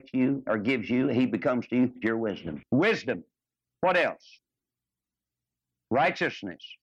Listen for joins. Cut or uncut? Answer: cut